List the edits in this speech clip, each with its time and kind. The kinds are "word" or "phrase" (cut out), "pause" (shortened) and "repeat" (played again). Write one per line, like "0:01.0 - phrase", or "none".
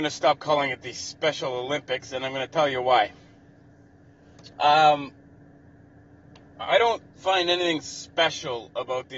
0:04.5 - pause
0:07.1 - pause